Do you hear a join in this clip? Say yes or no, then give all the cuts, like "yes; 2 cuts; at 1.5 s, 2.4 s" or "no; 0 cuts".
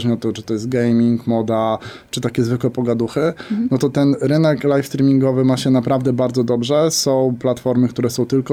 no; 0 cuts